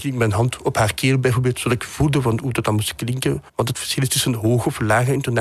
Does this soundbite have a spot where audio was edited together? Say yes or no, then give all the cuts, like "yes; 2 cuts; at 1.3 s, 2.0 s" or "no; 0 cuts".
yes; 1 cut; at 3.5 s